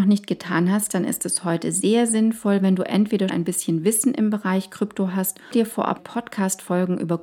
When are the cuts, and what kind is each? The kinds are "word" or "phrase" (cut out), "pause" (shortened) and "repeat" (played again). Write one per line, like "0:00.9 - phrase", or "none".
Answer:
0:03.3 - word
0:05.5 - word
0:06.0 - word